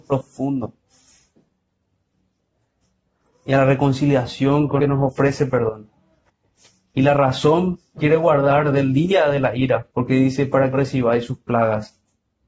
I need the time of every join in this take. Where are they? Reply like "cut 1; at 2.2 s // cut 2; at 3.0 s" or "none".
cut 1; at 4.8 s // cut 2; at 6.3 s // cut 3; at 8.0 s // cut 4; at 9.9 s // cut 5; at 10.7 s